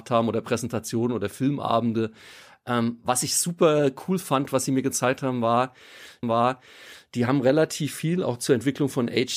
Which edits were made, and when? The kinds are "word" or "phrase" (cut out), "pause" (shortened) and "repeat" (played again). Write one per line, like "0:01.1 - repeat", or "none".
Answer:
0:06.2 - repeat